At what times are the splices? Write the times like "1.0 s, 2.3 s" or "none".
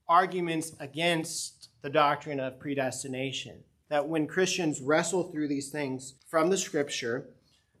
6.2 s

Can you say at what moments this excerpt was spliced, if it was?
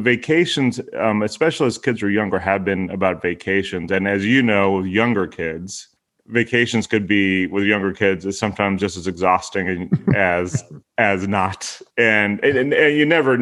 6.0 s, 10.8 s, 11.9 s

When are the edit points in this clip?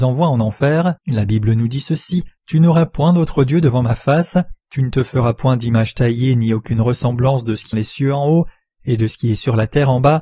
1.0 s, 2.4 s, 4.6 s, 7.7 s

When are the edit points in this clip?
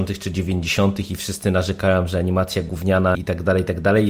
3.1 s

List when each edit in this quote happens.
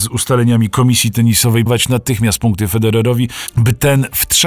1.7 s

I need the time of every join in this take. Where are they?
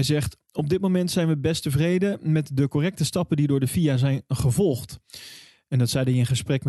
none

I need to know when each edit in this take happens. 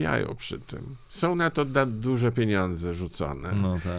none

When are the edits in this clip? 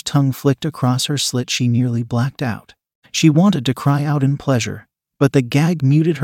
none

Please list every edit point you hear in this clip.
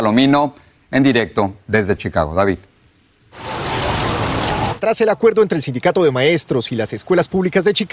none

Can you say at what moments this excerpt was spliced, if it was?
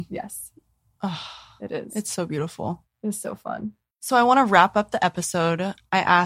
3.9 s

